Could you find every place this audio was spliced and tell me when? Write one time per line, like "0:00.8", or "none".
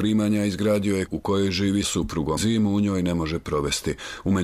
0:01.1
0:01.8
0:02.4